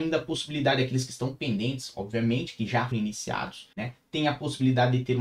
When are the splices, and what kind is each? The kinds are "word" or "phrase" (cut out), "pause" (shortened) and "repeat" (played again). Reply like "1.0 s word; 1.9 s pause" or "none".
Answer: 2.9 s word; 3.7 s pause

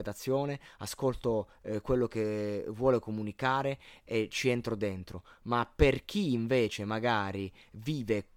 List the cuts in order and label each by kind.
none

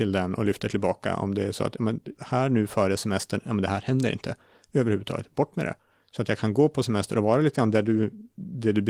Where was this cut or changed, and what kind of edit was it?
none

